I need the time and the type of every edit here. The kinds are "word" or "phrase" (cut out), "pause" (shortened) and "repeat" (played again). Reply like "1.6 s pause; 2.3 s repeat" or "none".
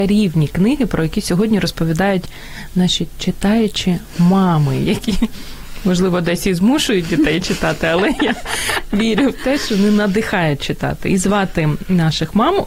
none